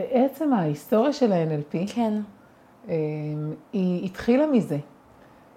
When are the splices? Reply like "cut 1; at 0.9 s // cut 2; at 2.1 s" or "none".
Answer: none

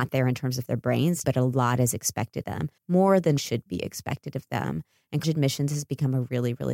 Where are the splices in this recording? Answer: cut 1; at 1.2 s // cut 2; at 2.4 s // cut 3; at 2.8 s // cut 4; at 3.4 s // cut 5; at 5.2 s

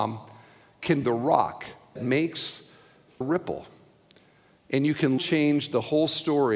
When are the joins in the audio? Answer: cut 1; at 1.0 s // cut 2; at 2.0 s // cut 3; at 3.2 s // cut 4; at 5.2 s

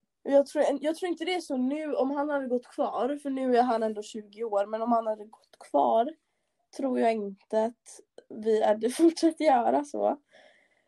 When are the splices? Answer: none

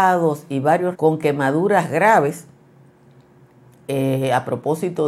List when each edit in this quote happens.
cut 1; at 0.9 s

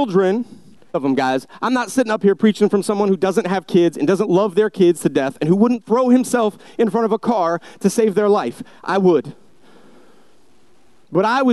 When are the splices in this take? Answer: cut 1; at 0.9 s

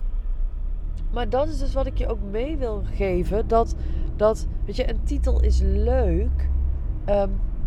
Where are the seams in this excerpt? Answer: none

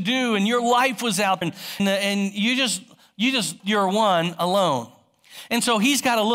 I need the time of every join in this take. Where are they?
cut 1; at 1.4 s // cut 2; at 1.8 s // cut 3; at 3.6 s

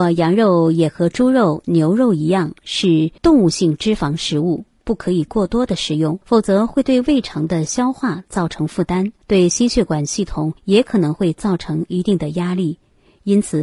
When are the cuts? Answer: cut 1; at 3.2 s // cut 2; at 6.2 s // cut 3; at 9.2 s // cut 4; at 10.6 s

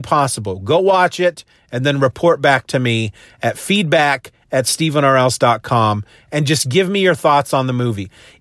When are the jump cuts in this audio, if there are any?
none

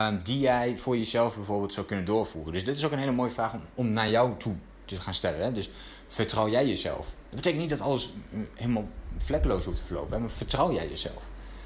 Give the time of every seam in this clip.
none

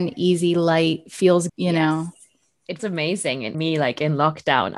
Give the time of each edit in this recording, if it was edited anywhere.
cut 1; at 1.5 s // cut 2; at 2.8 s // cut 3; at 3.5 s

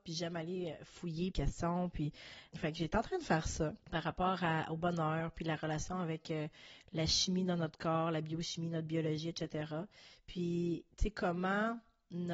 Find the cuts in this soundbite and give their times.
cut 1; at 1.3 s // cut 2; at 2.5 s // cut 3; at 3.8 s // cut 4; at 10.9 s

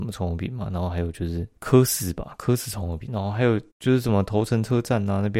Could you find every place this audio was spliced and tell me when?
cut 1; at 1.6 s // cut 2; at 3.1 s // cut 3; at 3.7 s

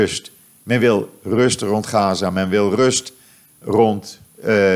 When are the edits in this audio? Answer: none

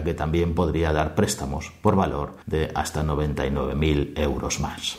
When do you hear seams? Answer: cut 1; at 2.4 s

